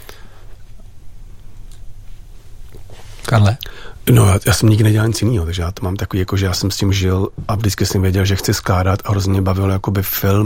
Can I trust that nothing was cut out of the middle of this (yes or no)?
yes